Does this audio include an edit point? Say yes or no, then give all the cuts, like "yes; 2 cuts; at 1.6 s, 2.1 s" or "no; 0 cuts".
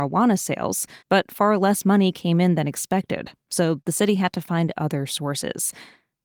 yes; 1 cut; at 1.0 s